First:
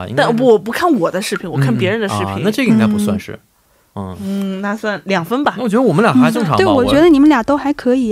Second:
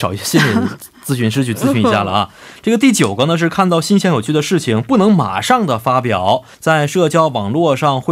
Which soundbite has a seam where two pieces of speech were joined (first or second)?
second